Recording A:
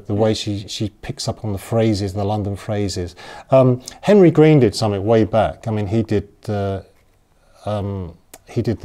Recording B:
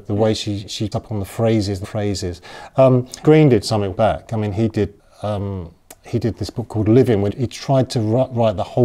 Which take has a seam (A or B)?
B